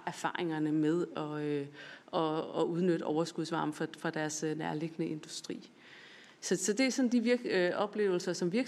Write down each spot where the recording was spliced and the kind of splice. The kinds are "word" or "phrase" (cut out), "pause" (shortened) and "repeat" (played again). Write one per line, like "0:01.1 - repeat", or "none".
none